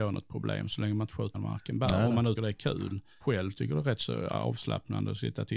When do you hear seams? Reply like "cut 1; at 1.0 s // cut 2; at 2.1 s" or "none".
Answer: cut 1; at 1.3 s // cut 2; at 2.4 s // cut 3; at 3.2 s